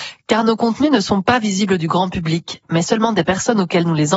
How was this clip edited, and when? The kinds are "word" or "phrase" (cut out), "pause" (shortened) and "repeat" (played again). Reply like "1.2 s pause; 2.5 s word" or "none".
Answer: none